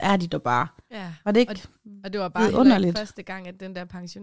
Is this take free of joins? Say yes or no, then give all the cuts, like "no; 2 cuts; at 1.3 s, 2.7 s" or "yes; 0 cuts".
yes; 0 cuts